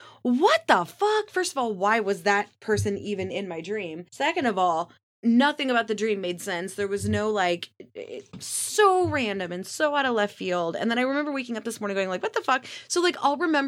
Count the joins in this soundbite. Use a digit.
2